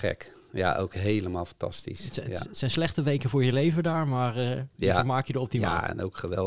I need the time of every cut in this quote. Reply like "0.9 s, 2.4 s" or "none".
4.7 s